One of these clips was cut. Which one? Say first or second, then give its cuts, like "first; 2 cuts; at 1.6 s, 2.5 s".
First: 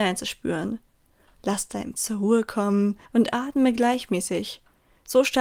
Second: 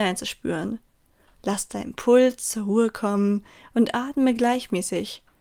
first; 2 cuts; at 2.0 s, 3.0 s